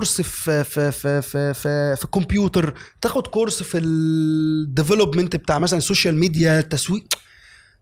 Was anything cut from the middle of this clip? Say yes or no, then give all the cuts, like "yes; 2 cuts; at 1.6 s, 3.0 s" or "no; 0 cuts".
no; 0 cuts